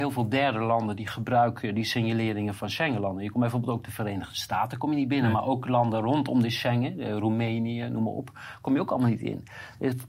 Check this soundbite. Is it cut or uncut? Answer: uncut